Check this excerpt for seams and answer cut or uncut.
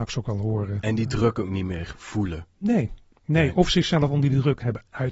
uncut